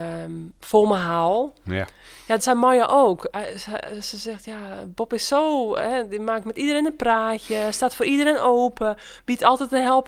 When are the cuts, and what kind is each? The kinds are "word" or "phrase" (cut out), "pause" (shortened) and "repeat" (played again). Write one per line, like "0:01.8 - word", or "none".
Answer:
0:02.4 - phrase